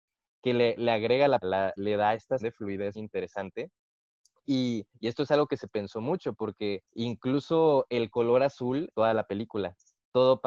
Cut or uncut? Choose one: cut